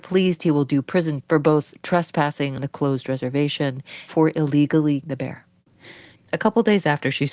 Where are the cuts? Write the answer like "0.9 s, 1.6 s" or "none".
1.2 s, 2.6 s, 4.1 s, 5.0 s